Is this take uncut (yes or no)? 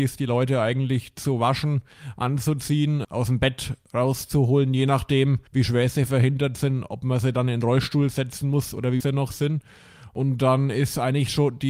no